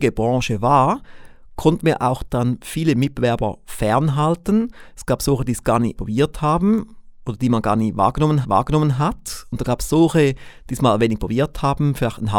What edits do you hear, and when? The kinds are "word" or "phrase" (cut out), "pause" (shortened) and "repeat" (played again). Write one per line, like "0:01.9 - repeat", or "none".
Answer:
0:06.0 - word
0:08.4 - repeat